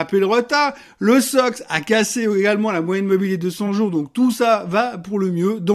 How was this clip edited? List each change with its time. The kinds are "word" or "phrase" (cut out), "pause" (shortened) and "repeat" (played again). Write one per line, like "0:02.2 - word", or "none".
none